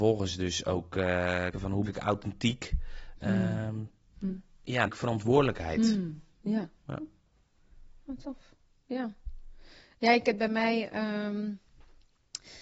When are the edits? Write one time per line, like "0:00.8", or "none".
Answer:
0:01.5
0:01.8
0:03.2
0:04.9
0:10.2